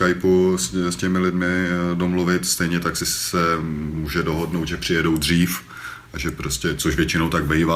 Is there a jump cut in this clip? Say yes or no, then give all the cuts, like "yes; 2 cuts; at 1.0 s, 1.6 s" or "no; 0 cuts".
no; 0 cuts